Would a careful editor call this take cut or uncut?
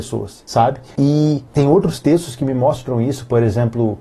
uncut